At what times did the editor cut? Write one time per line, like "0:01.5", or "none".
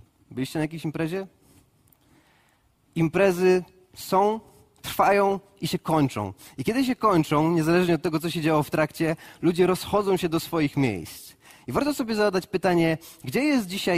none